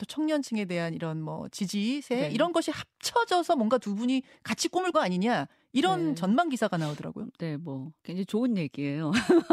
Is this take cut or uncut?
cut